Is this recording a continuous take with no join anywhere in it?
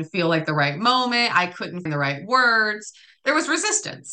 no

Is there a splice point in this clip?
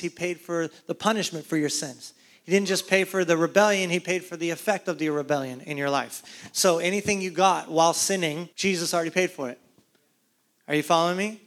yes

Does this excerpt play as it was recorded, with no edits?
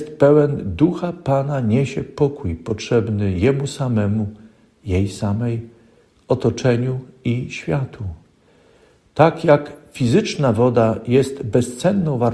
yes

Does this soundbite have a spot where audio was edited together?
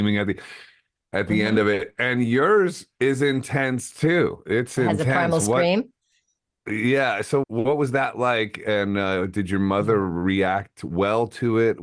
yes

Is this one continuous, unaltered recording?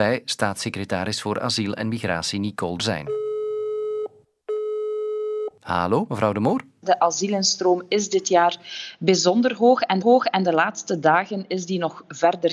no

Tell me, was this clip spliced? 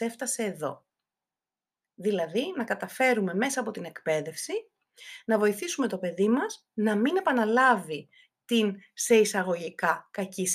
no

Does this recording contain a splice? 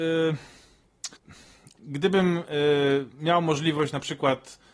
yes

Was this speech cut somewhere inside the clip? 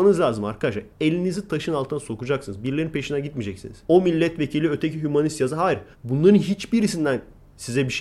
yes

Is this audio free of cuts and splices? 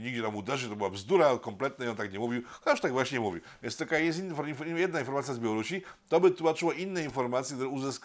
yes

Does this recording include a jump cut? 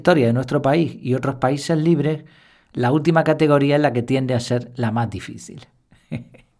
no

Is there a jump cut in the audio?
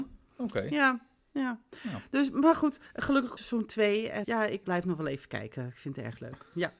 yes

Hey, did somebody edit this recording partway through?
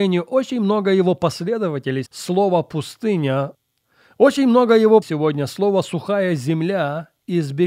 yes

